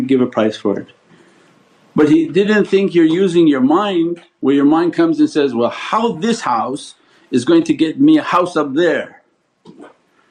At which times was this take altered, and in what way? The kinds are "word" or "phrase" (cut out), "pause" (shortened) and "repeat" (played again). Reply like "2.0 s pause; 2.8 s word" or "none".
none